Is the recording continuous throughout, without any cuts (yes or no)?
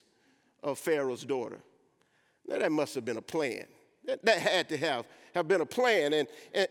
yes